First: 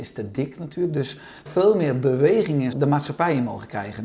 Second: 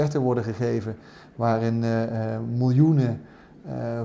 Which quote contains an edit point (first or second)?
first